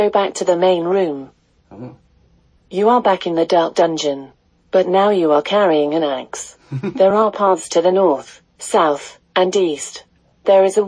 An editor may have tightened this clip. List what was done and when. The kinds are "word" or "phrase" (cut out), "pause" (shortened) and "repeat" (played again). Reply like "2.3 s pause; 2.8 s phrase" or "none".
none